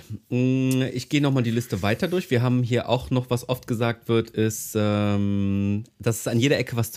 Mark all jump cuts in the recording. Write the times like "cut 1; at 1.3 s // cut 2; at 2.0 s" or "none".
none